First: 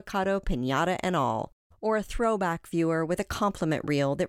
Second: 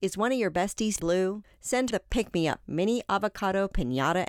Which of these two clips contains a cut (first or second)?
second